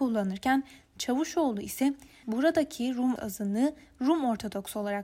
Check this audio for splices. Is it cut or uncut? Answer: cut